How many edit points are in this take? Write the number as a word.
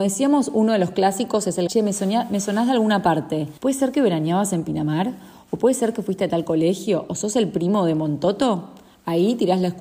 two